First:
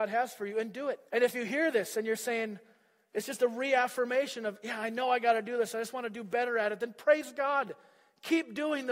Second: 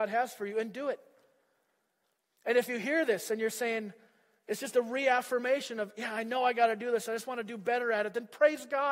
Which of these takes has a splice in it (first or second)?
first